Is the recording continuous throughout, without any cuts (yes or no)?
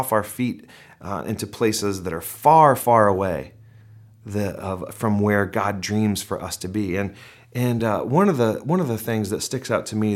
yes